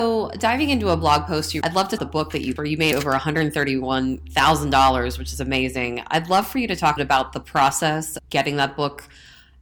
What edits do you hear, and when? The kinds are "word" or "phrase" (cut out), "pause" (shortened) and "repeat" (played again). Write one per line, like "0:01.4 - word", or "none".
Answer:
0:01.6 - word
0:02.0 - phrase
0:02.6 - word
0:02.9 - word
0:07.0 - phrase
0:08.2 - word